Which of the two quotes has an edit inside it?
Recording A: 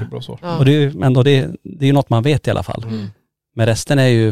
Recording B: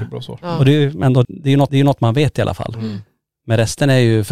B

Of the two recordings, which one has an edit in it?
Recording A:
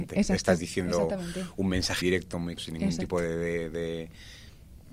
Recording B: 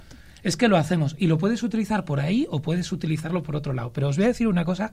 A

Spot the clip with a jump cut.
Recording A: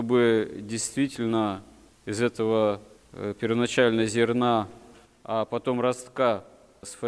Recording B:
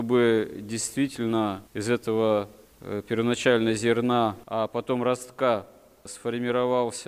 B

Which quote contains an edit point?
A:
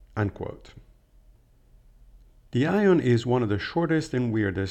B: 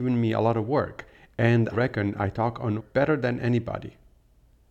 B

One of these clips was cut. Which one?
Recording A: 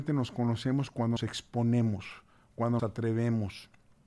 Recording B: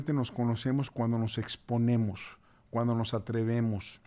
A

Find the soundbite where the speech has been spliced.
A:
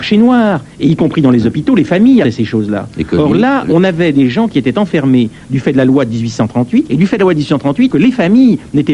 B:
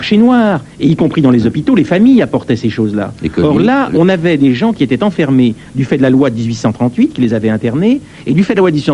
A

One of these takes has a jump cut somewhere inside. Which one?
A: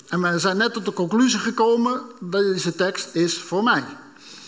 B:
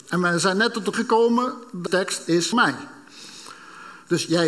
B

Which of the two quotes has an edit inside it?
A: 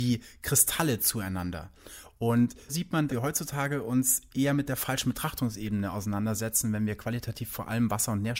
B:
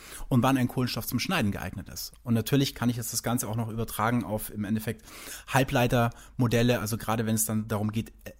A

